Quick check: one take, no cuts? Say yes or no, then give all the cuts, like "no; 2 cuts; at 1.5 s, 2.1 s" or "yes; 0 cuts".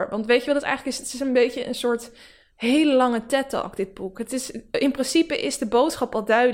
yes; 0 cuts